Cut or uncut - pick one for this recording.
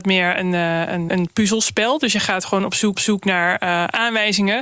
cut